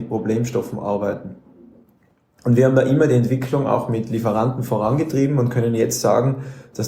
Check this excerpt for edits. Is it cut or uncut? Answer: uncut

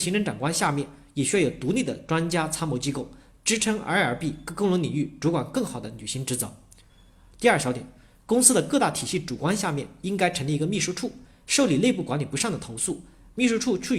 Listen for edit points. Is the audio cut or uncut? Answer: uncut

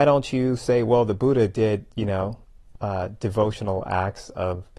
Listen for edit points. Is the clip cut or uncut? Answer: uncut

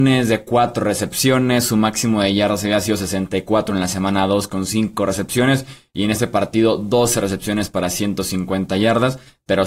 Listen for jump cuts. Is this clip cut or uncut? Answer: uncut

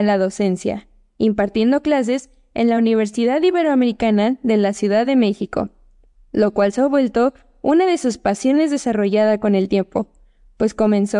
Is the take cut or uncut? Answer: uncut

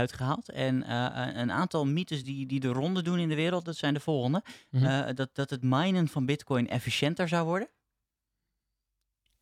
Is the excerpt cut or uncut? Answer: uncut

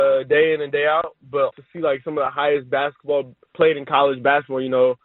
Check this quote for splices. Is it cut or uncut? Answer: cut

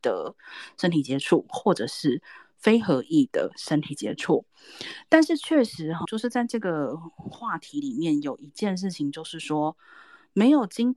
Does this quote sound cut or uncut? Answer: cut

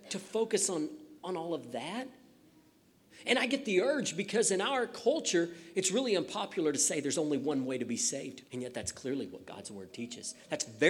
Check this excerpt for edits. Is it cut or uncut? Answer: cut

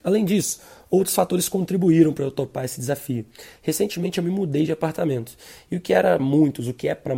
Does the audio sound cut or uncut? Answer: cut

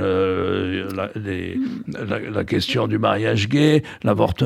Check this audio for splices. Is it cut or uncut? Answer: uncut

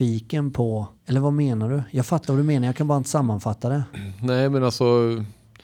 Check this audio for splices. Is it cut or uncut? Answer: cut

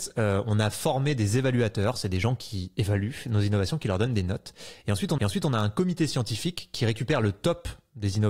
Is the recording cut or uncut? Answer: cut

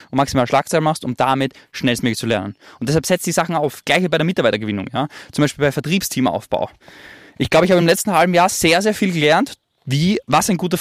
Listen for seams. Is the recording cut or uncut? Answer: uncut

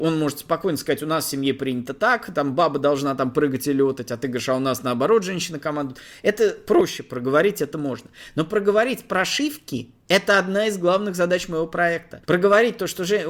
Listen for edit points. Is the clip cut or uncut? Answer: cut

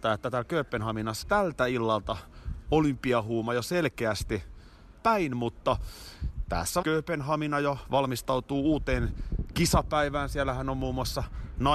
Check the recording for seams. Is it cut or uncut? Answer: cut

